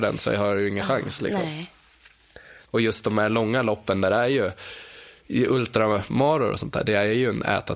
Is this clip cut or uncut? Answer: uncut